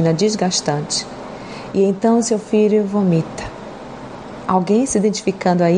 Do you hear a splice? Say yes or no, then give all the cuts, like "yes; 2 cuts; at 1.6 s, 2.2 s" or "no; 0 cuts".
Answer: no; 0 cuts